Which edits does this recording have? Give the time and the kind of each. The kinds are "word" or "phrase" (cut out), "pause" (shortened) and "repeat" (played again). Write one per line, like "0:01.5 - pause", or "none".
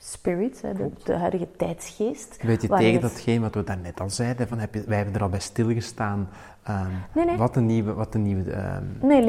none